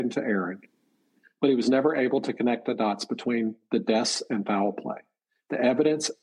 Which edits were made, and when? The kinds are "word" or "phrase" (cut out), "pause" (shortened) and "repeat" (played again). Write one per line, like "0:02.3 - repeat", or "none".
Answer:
none